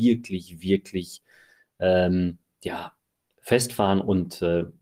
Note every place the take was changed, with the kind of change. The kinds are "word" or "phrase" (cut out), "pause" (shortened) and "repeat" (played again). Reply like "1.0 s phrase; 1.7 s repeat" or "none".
none